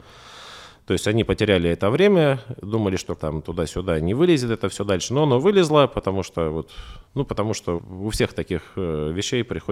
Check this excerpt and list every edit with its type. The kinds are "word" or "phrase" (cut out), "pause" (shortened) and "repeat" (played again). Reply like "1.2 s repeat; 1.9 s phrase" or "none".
3.2 s word; 7.0 s pause; 7.8 s word